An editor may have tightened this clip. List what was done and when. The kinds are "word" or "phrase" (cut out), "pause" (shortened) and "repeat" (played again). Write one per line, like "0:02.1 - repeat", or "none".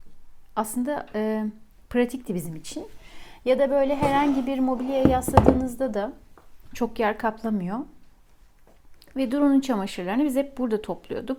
none